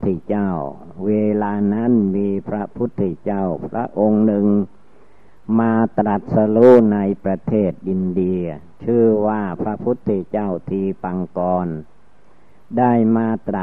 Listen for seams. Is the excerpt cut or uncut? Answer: cut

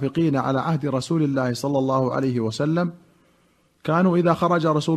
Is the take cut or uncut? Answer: uncut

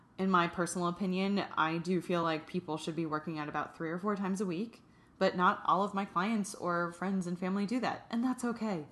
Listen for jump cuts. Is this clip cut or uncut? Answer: uncut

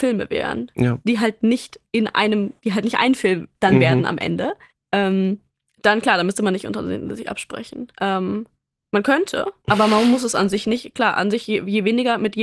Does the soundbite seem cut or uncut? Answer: cut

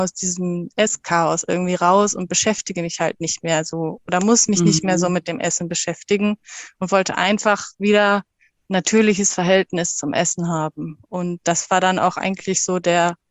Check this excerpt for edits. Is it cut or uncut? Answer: uncut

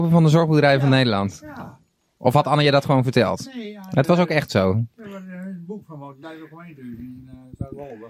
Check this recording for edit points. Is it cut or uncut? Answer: cut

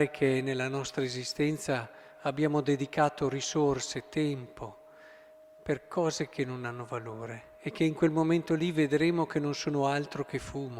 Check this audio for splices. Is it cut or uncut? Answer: uncut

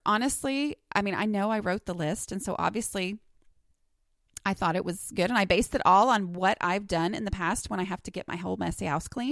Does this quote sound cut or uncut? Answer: uncut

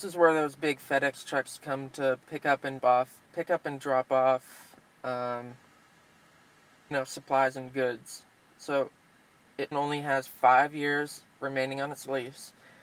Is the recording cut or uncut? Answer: cut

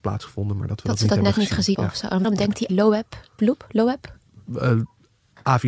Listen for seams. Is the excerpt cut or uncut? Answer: cut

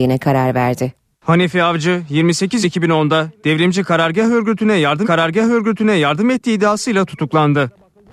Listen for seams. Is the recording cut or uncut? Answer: cut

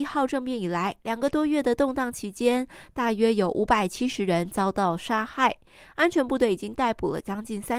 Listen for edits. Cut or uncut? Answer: uncut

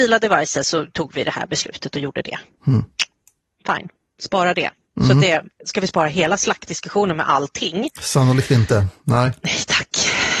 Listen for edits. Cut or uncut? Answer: uncut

